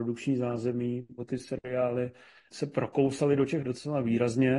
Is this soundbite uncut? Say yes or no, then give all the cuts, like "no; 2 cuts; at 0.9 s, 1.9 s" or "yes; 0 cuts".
no; 3 cuts; at 1.2 s, 2.5 s, 3.6 s